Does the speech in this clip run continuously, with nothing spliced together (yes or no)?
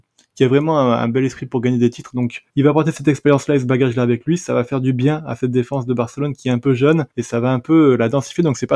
no